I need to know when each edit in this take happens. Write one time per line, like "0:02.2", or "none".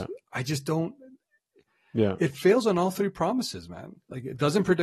none